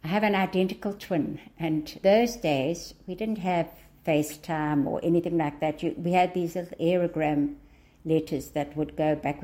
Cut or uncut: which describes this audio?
cut